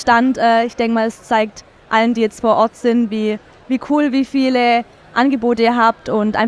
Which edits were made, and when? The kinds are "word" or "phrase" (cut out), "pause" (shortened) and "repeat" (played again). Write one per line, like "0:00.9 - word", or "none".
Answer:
none